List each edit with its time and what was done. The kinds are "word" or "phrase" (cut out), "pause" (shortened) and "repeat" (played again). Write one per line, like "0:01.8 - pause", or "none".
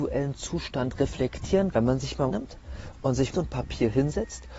0:01.7 - word
0:02.3 - phrase
0:03.3 - phrase

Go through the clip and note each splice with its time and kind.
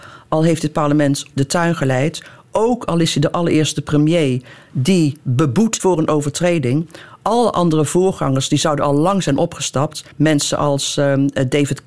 0:01.3 - word
0:05.8 - word
0:10.1 - pause

